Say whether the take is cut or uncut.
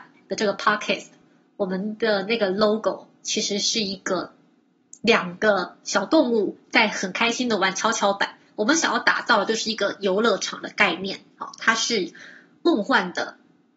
uncut